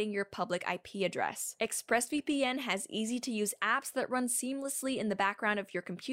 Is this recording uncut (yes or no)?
yes